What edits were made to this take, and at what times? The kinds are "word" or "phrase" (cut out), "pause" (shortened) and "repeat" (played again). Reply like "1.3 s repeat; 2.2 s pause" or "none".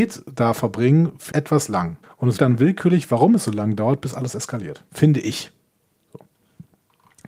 1.3 s word; 2.0 s pause; 2.4 s word; 4.9 s pause